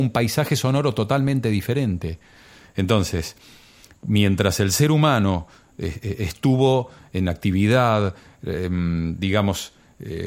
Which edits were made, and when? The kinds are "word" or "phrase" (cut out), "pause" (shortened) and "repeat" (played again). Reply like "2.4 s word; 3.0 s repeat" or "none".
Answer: none